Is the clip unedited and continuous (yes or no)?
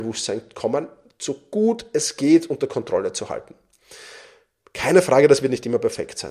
yes